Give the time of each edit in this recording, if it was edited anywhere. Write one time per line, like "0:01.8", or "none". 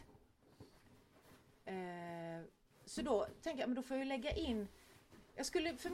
none